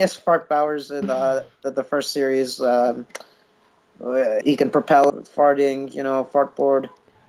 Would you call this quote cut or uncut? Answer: cut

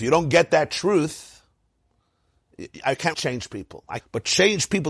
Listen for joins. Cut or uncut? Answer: cut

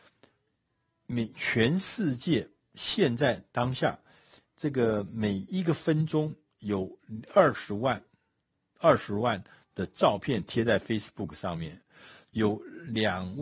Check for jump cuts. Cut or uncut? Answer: uncut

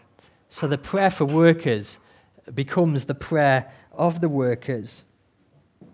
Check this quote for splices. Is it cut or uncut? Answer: cut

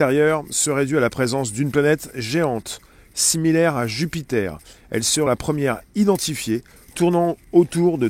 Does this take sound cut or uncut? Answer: cut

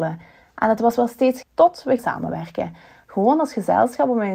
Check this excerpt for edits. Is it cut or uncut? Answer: cut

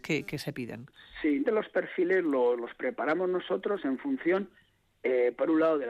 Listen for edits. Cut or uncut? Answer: cut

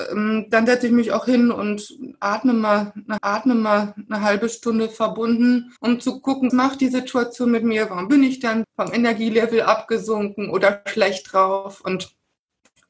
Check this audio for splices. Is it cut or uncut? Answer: cut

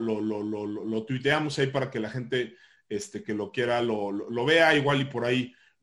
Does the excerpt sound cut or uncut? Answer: uncut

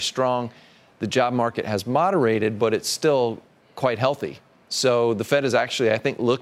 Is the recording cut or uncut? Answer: uncut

